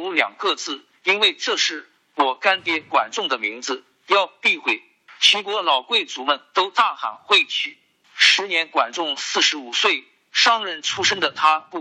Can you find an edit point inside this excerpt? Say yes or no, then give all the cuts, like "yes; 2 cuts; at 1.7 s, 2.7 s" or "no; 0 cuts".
no; 0 cuts